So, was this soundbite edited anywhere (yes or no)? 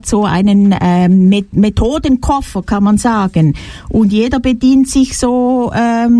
no